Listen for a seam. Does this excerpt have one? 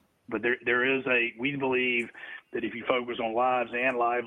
no; 0 cuts

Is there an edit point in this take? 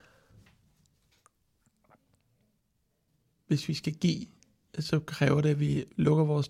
no; 0 cuts

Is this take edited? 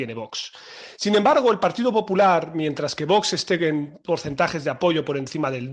no; 0 cuts

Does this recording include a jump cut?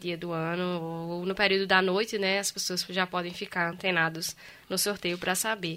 no; 0 cuts

